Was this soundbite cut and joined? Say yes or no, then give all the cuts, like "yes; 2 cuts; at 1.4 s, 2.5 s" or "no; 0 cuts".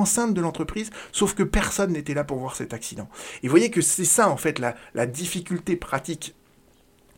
no; 0 cuts